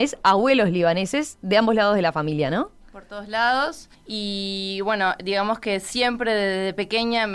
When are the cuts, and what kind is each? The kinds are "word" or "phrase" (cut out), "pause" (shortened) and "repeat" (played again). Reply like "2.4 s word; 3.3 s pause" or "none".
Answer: 3.9 s pause